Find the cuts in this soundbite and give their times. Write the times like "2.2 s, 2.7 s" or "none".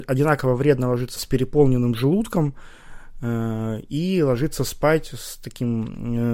1.2 s